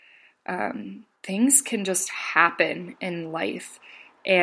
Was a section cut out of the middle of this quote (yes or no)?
yes